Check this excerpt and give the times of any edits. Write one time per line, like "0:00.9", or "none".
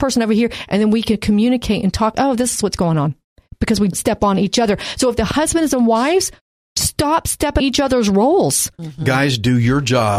0:02.1
0:03.9
0:07.6